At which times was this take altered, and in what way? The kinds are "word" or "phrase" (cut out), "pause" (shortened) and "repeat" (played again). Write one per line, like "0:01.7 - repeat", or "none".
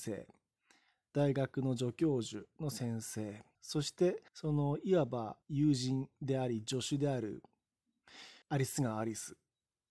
0:03.5 - pause
0:04.3 - pause
0:05.4 - pause
0:08.4 - pause